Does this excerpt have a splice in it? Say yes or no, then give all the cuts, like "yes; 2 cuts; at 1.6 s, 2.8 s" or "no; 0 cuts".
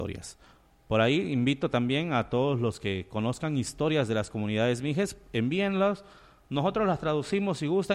no; 0 cuts